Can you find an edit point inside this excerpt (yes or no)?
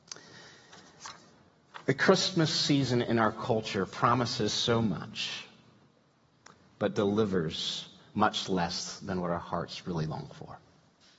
no